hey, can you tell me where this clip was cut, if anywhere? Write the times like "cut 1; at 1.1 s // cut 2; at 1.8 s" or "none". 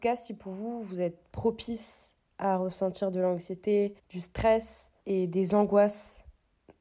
cut 1; at 4.0 s // cut 2; at 5.0 s